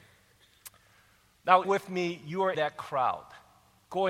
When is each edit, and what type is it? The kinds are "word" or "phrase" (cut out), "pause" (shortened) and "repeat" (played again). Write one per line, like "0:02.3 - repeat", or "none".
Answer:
0:01.6 - word
0:02.5 - word

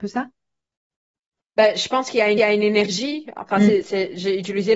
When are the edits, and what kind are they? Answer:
0:02.4 - repeat

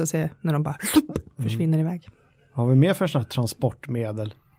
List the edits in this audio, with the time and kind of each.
none

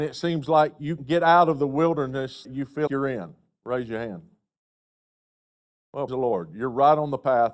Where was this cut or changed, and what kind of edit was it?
0:01.0 - word
0:02.4 - word
0:02.9 - word
0:06.1 - word

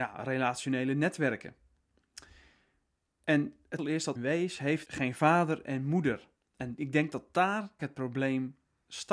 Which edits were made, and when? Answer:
0:03.8 - word
0:04.2 - word
0:04.8 - word
0:07.8 - word

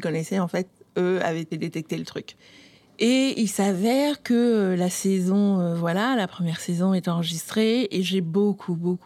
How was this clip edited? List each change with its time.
0:01.5 - phrase

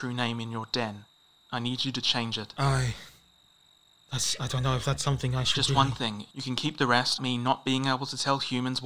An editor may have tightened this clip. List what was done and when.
0:07.2 - word

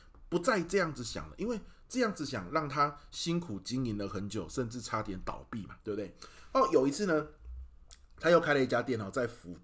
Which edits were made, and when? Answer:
0:05.8 - pause

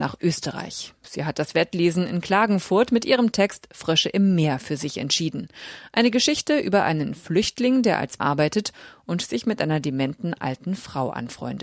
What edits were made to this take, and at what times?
0:08.2 - word

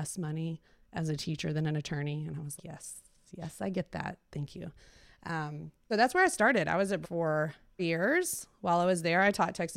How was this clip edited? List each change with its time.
0:02.6 - word
0:05.9 - word
0:07.0 - word
0:07.8 - word

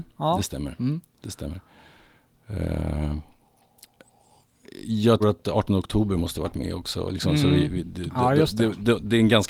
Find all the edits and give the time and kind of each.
0:05.2 - word

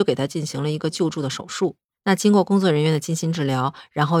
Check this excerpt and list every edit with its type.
none

